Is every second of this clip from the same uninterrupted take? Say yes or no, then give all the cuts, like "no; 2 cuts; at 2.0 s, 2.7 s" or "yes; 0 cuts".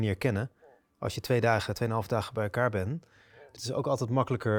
no; 1 cut; at 3.6 s